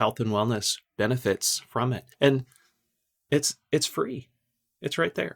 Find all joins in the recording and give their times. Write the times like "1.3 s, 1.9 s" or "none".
2.1 s